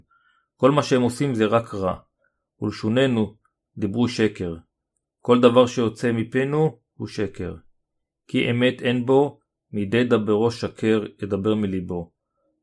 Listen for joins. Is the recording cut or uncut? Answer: uncut